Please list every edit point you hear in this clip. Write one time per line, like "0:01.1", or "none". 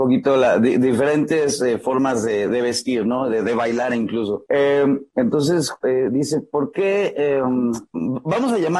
0:02.5